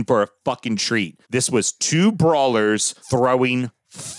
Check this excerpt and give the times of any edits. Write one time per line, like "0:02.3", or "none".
0:01.2
0:03.0